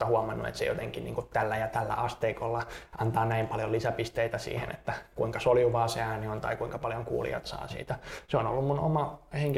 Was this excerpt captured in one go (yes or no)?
yes